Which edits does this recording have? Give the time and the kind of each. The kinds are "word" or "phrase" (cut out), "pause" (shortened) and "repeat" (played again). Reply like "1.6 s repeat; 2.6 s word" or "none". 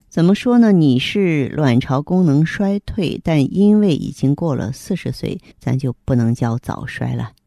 5.5 s pause